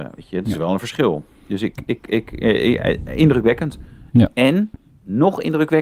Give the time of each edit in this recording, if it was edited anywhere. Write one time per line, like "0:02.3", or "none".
none